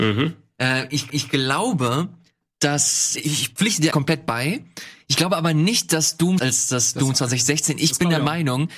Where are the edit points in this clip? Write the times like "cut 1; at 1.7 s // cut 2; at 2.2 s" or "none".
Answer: cut 1; at 1.1 s // cut 2; at 3.2 s // cut 3; at 3.9 s // cut 4; at 6.4 s